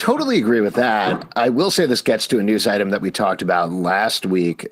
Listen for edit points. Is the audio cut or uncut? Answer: uncut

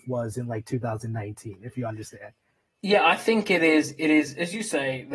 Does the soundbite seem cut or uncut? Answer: uncut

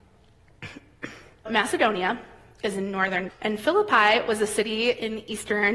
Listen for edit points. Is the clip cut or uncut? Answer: cut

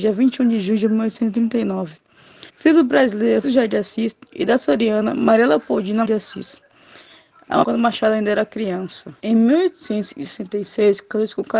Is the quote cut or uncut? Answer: cut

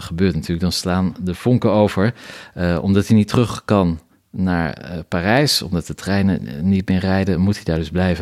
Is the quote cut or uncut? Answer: uncut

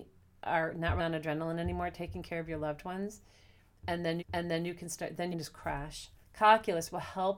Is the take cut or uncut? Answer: cut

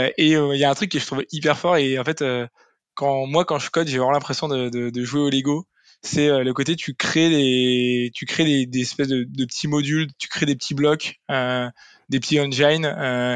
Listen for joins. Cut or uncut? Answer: uncut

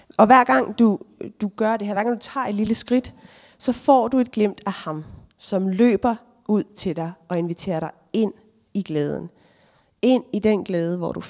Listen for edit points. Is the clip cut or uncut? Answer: uncut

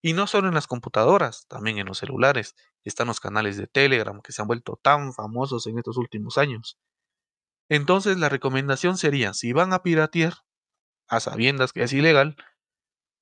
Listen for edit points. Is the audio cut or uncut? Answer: uncut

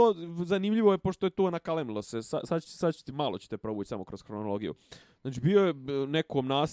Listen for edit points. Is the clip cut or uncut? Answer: uncut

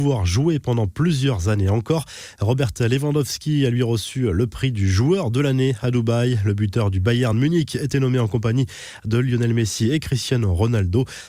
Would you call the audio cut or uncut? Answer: uncut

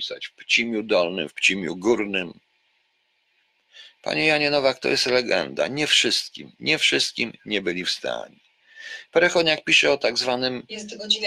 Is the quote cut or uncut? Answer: uncut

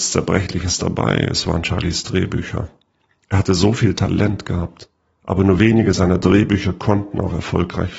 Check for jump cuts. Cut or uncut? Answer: uncut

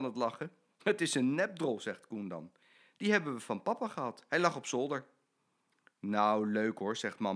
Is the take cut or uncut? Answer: uncut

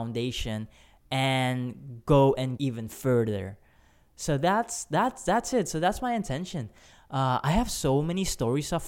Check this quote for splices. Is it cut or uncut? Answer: cut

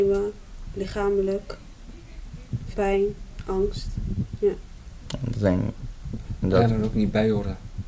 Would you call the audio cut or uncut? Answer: cut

